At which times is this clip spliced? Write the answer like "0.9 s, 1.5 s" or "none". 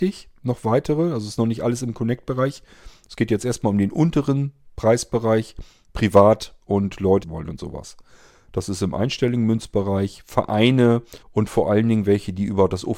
6.6 s, 7.2 s, 11.2 s